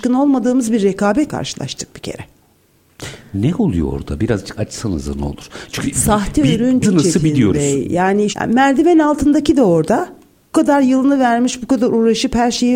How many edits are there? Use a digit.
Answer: 6